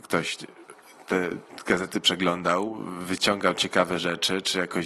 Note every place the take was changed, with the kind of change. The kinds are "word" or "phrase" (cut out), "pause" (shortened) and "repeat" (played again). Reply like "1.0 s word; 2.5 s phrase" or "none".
none